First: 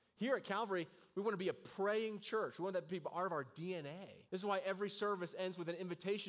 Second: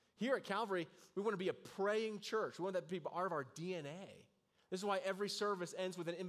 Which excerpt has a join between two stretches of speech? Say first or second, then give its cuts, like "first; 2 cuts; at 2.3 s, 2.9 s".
first; 1 cut; at 4.3 s